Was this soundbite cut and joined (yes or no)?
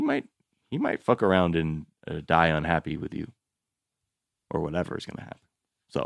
no